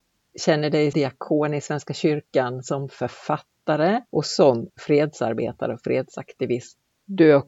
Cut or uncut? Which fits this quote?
cut